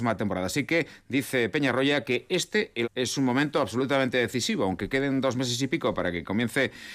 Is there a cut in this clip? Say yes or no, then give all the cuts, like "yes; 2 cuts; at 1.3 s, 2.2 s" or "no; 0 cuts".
yes; 1 cut; at 2.8 s